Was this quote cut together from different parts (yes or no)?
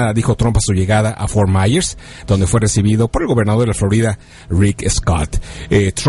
no